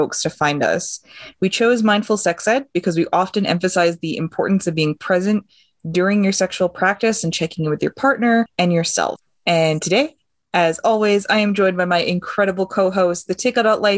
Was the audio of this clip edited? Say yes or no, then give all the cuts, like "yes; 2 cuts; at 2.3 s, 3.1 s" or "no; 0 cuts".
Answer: no; 0 cuts